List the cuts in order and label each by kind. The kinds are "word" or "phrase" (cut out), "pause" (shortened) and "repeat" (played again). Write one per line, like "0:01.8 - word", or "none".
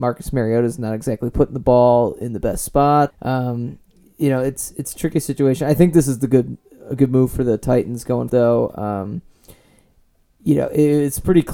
0:03.1 - word
0:08.3 - word